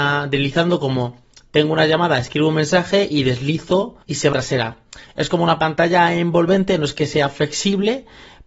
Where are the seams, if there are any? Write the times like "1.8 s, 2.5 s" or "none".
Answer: 4.0 s, 4.3 s